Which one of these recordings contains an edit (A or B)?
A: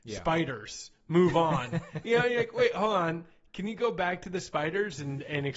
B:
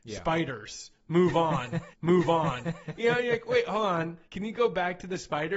B